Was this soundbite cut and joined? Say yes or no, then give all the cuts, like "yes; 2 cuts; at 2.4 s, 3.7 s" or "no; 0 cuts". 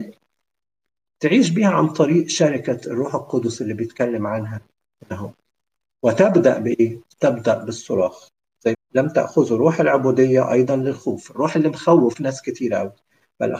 yes; 1 cut; at 8.7 s